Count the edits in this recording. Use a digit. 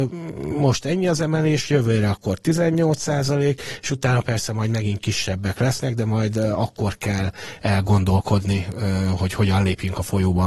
0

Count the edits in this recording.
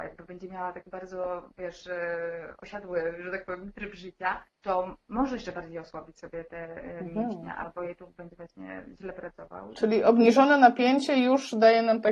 1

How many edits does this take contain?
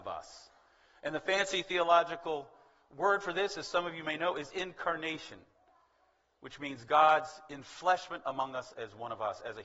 1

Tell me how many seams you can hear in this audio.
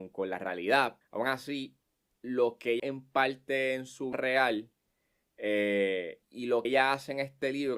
5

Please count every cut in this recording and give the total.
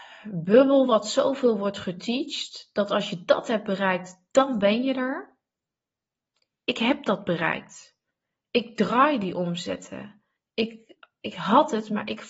1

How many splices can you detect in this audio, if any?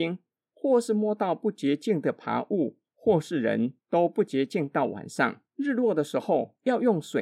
2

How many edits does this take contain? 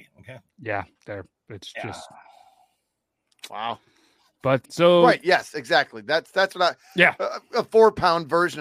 2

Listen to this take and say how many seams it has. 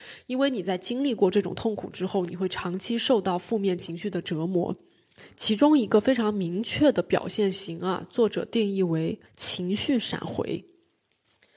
1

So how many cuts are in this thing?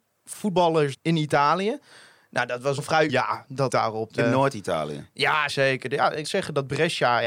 7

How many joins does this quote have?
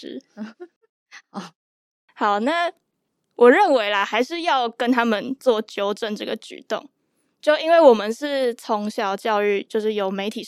0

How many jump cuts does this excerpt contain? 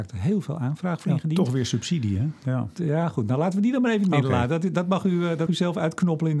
1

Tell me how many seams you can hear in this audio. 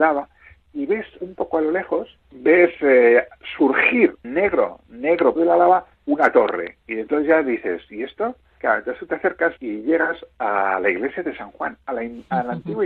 8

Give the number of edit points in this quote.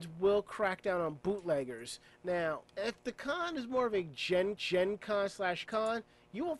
3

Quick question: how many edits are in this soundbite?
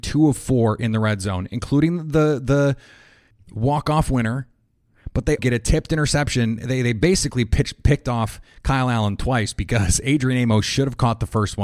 1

